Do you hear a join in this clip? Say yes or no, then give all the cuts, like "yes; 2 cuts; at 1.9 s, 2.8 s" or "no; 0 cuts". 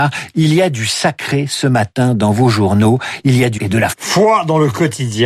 yes; 2 cuts; at 3.6 s, 3.9 s